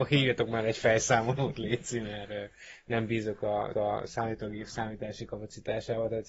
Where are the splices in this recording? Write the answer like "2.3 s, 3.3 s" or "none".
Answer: 3.7 s